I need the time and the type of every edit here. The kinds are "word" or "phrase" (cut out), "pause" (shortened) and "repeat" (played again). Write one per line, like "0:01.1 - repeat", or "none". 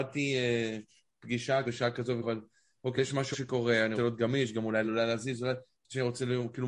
0:01.6 - word
0:02.2 - word
0:03.0 - word
0:03.3 - word
0:04.0 - word
0:04.8 - word